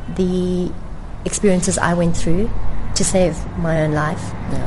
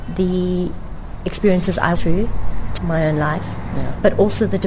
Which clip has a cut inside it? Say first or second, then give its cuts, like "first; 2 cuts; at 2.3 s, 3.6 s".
second; 2 cuts; at 2.0 s, 2.8 s